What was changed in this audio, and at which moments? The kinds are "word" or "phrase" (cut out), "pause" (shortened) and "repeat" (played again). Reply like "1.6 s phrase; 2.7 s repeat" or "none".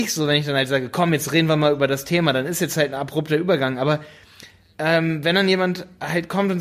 none

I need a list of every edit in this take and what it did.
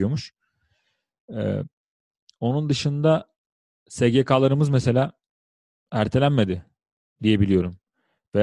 none

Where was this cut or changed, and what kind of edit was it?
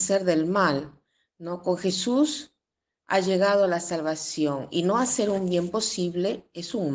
none

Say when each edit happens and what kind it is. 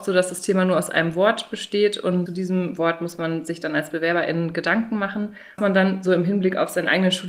2.3 s word; 5.6 s phrase

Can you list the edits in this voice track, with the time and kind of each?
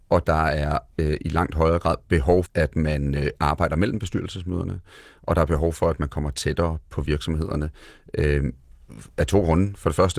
2.5 s word

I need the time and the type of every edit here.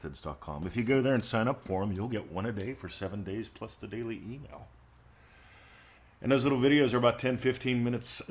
none

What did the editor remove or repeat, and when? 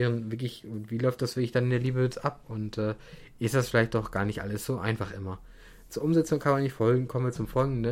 none

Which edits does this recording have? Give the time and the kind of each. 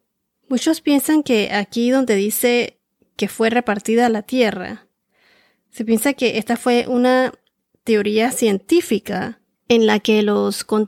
none

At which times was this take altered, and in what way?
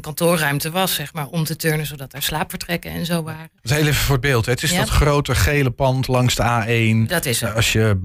3.6 s pause

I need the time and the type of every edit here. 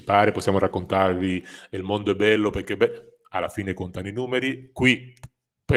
none

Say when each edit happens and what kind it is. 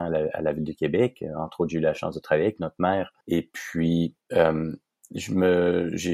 3.2 s pause; 4.2 s pause

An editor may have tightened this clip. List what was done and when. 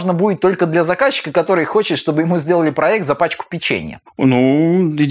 none

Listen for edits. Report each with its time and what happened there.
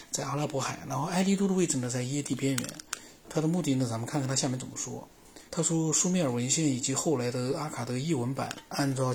5.5 s pause

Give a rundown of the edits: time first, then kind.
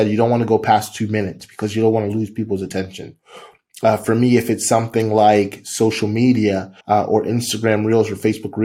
6.8 s pause

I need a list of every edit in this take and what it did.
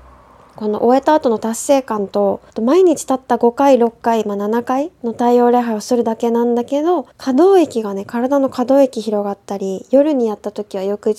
2.5 s pause; 7.1 s pause

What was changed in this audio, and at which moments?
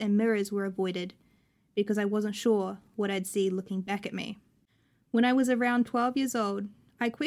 none

